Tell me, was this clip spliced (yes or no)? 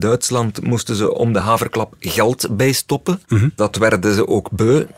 no